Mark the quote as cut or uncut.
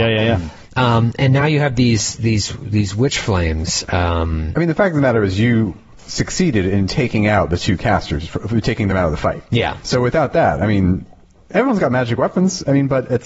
uncut